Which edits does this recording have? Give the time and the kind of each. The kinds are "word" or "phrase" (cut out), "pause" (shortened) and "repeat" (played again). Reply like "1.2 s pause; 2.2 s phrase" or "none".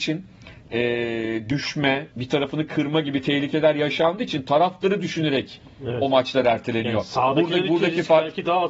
2.1 s pause